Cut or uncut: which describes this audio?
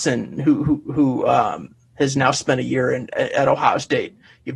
uncut